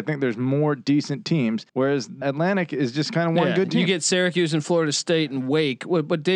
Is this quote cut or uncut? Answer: cut